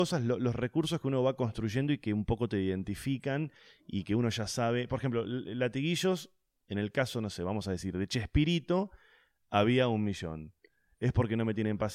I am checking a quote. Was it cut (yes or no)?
no